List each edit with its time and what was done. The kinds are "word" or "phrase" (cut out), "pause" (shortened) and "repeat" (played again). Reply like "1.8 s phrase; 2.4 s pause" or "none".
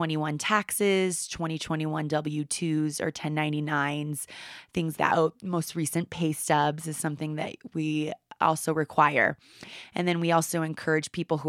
5.0 s word